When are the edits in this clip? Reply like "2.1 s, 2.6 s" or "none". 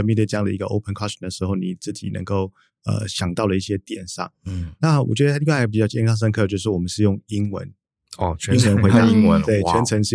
none